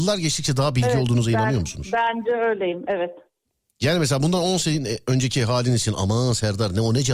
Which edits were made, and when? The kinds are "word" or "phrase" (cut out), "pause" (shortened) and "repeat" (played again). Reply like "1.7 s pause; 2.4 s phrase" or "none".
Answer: none

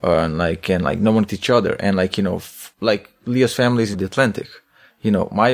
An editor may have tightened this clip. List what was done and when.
1.3 s phrase; 2.7 s pause; 3.9 s phrase

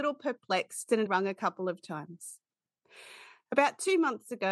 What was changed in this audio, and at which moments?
1.1 s word

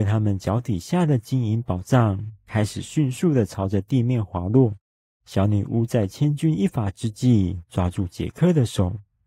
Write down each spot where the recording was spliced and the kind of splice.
4.9 s pause

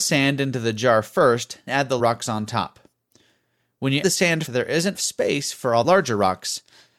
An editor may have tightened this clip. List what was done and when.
1.7 s word; 2.0 s word; 4.0 s word; 4.5 s word; 4.9 s word; 5.8 s word

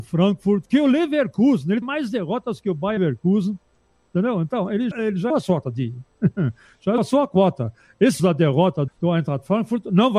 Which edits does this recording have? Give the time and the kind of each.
1.8 s word; 3.0 s word; 4.9 s word; 5.3 s word; 5.6 s word; 7.0 s word; 8.2 s word; 8.9 s word

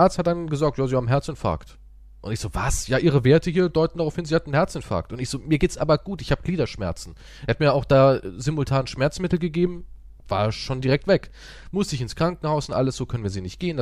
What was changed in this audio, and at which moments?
none

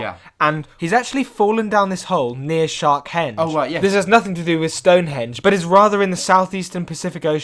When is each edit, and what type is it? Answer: none

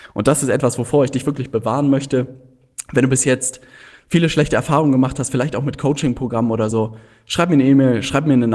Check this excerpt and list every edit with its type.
none

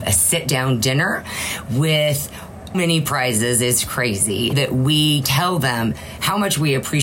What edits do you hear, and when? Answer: 2.7 s word; 4.5 s word; 5.2 s word

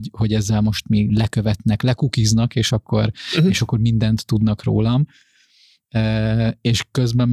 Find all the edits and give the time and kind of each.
none

